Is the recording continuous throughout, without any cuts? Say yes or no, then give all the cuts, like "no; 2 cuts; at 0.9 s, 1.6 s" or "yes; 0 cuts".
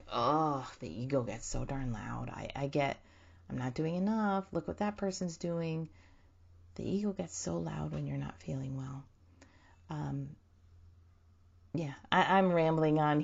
yes; 0 cuts